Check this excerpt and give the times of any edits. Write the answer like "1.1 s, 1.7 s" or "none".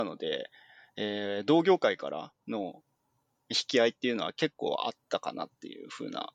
none